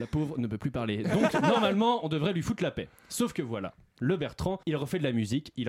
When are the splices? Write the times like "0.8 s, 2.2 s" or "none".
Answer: 4.6 s